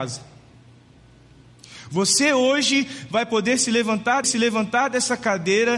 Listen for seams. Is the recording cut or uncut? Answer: cut